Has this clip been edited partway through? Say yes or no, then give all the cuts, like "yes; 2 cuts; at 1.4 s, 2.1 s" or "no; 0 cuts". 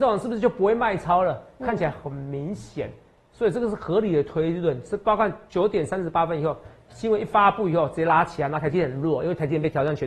no; 0 cuts